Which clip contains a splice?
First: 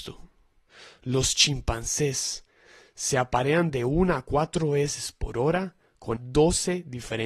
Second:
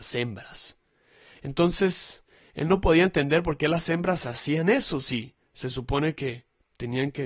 first; 1 cut; at 6.2 s

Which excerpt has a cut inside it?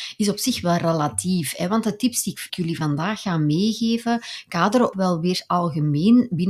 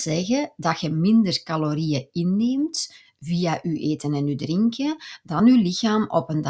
first; 2 cuts; at 2.5 s, 4.9 s

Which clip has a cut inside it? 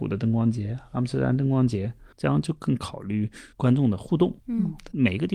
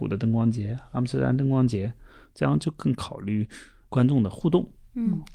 first; 3 cuts; at 2.1 s, 3.5 s, 4.4 s

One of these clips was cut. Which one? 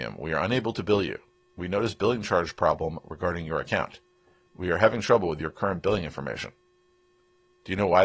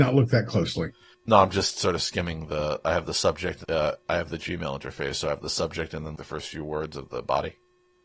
second; 3 cuts; at 1.1 s, 3.6 s, 6.1 s

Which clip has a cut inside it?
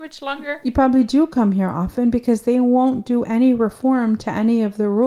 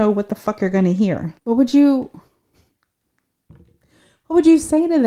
second; 1 cut; at 1.4 s

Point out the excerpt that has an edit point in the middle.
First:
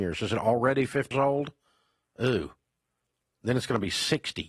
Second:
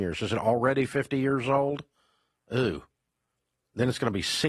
first; 1 cut; at 1.1 s

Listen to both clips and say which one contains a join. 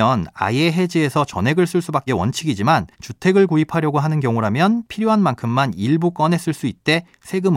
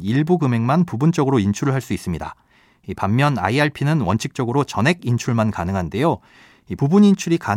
first; 2 cuts; at 2.1 s, 2.9 s

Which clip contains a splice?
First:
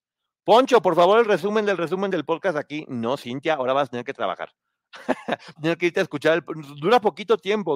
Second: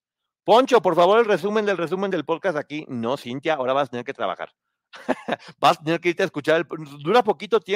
first; 1 cut; at 5.6 s

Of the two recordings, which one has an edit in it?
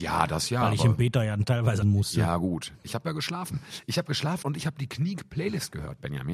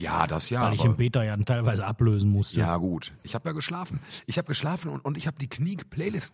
first; 2 cuts; at 1.8 s, 4.4 s

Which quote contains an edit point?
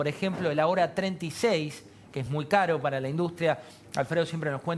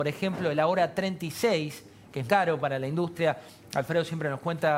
second; 1 cut; at 2.3 s

